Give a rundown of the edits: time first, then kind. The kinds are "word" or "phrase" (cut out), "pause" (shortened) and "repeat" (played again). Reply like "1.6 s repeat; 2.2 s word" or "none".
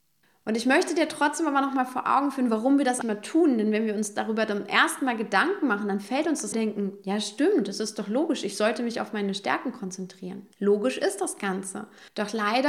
3.0 s word; 6.5 s phrase; 10.5 s pause